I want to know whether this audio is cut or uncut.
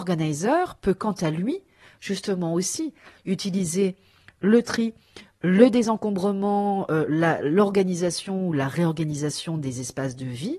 uncut